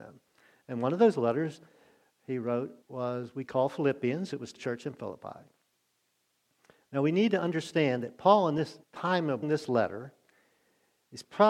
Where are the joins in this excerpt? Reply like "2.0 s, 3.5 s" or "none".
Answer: 2.8 s, 4.6 s, 8.8 s, 9.4 s